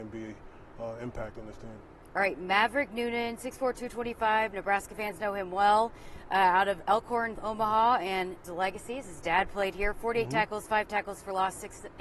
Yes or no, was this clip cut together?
yes